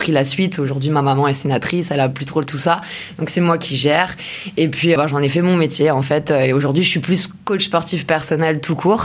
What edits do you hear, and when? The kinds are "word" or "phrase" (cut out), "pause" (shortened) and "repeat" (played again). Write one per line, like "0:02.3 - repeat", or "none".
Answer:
0:02.5 - phrase
0:05.0 - word